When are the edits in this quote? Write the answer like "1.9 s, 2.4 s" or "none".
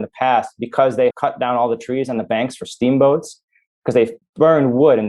1.1 s